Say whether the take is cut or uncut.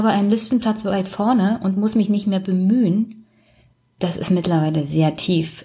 uncut